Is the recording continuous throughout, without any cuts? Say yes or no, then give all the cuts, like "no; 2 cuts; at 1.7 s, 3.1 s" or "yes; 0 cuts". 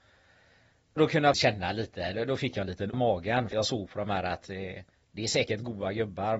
no; 4 cuts; at 1.0 s, 1.3 s, 2.9 s, 3.5 s